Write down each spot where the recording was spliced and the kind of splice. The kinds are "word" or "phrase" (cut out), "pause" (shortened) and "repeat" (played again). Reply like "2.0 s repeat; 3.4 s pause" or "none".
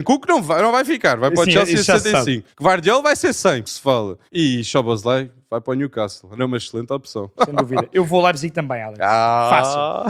2.5 s pause; 3.6 s word; 4.3 s pause